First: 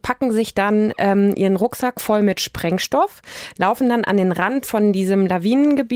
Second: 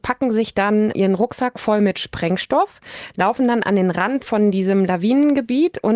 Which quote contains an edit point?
second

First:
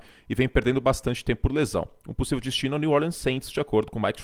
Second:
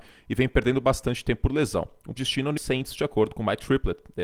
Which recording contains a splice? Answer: second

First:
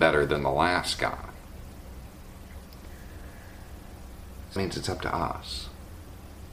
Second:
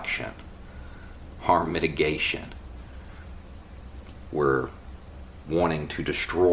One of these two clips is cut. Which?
first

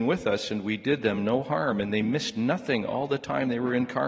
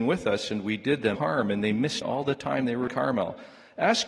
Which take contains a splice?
second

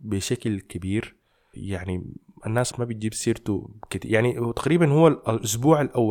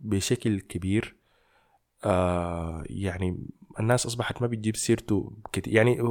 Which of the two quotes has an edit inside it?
first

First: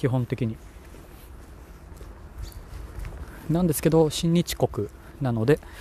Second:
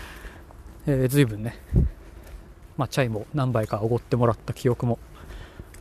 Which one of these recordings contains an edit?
second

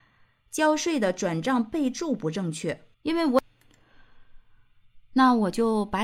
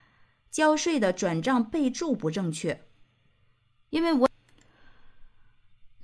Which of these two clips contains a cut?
first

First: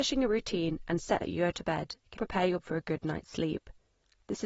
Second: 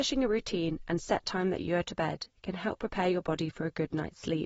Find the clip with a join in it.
first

